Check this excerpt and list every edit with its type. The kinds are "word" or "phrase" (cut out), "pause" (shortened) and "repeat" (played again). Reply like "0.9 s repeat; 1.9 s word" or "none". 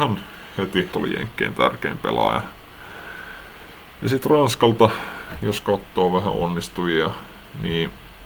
0.9 s phrase

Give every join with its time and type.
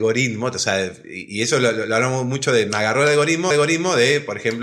3.5 s repeat

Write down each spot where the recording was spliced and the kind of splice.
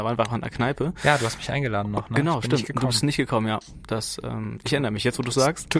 none

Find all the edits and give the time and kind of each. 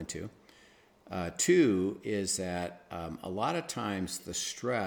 none

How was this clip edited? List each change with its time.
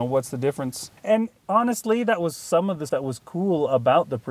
1.0 s pause; 2.9 s word

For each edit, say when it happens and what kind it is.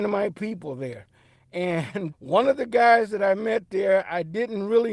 2.1 s word

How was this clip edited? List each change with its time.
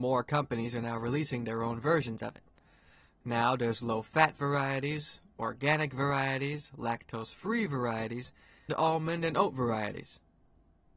8.7 s word

